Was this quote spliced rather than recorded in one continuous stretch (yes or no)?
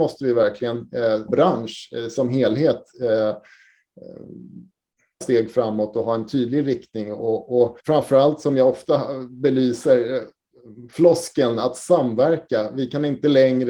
yes